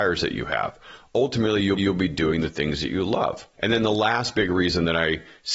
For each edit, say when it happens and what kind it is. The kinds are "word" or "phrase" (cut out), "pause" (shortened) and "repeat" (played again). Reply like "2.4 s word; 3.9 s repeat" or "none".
1.8 s repeat; 3.5 s pause